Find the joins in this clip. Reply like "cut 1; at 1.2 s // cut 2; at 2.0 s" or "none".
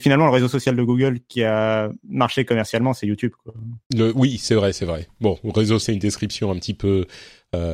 cut 1; at 3.8 s // cut 2; at 5.8 s